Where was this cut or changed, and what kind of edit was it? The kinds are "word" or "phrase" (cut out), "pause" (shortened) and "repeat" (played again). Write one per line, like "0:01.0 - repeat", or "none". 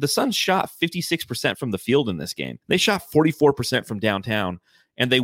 0:02.6 - pause